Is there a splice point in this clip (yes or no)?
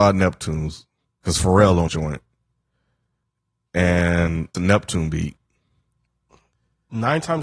yes